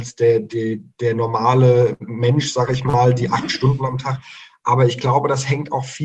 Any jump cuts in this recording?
yes; 1 cut; at 0.9 s

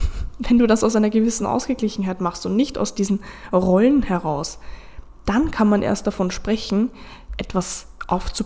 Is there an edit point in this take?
no; 0 cuts

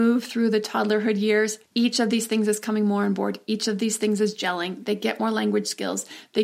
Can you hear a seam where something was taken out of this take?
yes; 1 cut; at 1.7 s

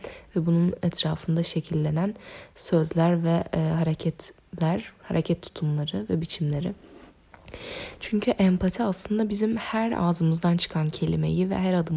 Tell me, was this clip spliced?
no; 0 cuts

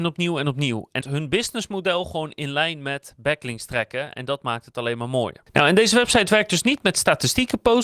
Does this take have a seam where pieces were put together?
yes; 1 cut; at 1.0 s

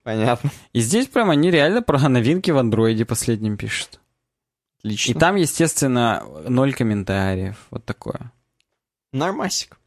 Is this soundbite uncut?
yes; 0 cuts

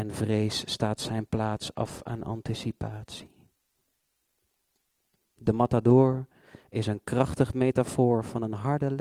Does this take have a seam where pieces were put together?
no; 0 cuts

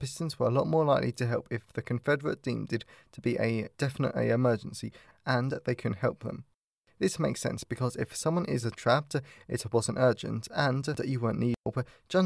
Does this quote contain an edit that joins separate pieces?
no; 0 cuts

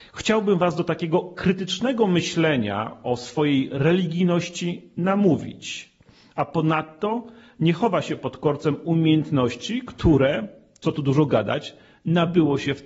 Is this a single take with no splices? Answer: yes; 0 cuts

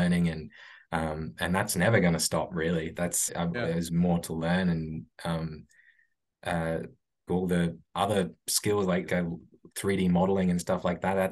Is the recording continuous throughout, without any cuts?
no; 4 cuts; at 3.3 s, 3.9 s, 7.3 s, 9.1 s

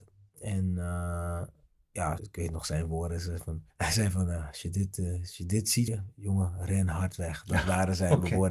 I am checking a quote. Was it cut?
yes; 3 cuts; at 2.2 s, 3.7 s, 5.9 s

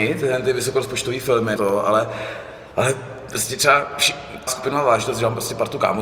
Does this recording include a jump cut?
yes; 2 cuts; at 1.6 s, 4.5 s

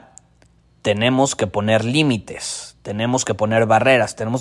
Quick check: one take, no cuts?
yes; 0 cuts

